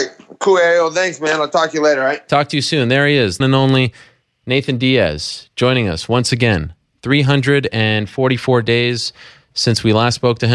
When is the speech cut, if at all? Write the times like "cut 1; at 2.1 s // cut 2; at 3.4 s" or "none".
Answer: cut 1; at 3.4 s